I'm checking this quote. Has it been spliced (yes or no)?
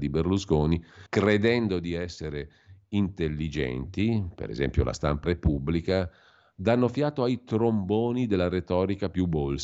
yes